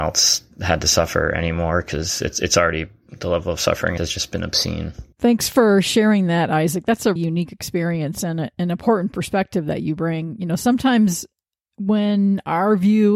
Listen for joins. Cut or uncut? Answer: cut